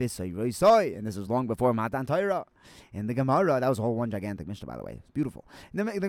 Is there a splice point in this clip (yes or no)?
no